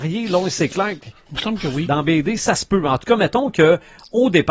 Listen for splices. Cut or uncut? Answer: uncut